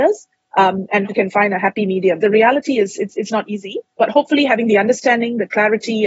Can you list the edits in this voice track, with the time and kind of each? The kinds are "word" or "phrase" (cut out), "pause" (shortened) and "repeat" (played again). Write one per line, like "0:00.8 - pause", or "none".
0:01.1 - word
0:02.2 - word
0:03.9 - pause